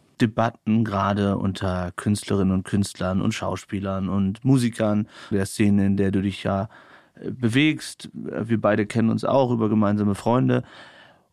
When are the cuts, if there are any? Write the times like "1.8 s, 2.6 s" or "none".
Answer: 5.3 s